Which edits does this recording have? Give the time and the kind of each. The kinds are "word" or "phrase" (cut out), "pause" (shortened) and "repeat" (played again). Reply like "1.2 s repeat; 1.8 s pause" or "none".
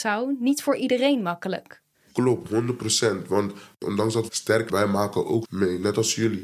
1.9 s pause; 4.3 s word; 4.7 s word; 5.4 s word

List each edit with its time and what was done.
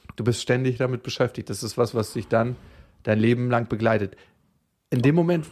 none

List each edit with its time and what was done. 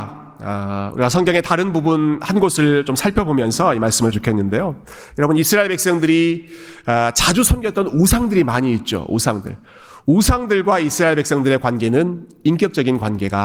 4.1 s phrase

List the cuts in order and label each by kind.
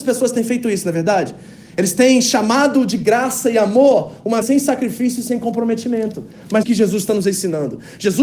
4.4 s word; 6.6 s phrase

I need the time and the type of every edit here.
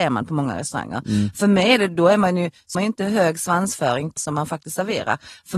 2.7 s phrase; 4.2 s word

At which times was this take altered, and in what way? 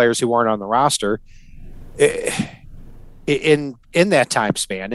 3.8 s pause

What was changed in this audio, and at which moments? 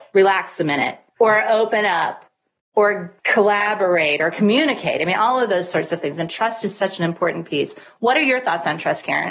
1.1 s pause; 3.2 s pause

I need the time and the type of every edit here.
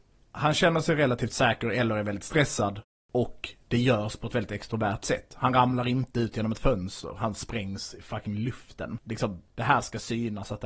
none

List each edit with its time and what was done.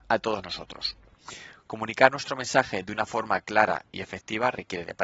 none

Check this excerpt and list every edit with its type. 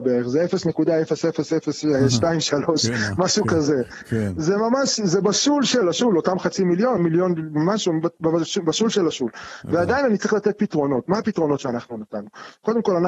5.8 s phrase; 7.0 s phrase

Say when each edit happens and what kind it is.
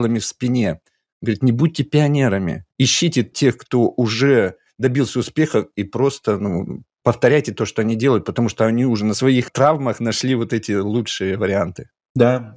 2.7 s pause

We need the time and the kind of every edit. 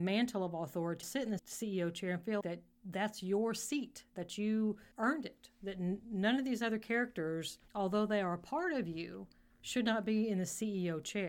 1.0 s phrase; 1.4 s word; 2.4 s word; 4.9 s pause; 7.7 s pause; 9.5 s pause

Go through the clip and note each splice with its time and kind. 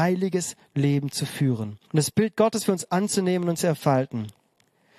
1.8 s pause

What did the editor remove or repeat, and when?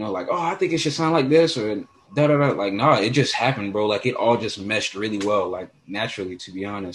2.0 s word

